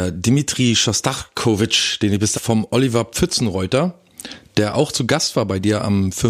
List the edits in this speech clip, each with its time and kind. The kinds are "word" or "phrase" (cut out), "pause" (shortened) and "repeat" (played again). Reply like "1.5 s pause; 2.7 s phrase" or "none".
2.3 s phrase